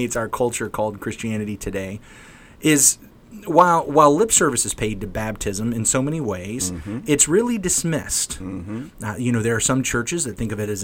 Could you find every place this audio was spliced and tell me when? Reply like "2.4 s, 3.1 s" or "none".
none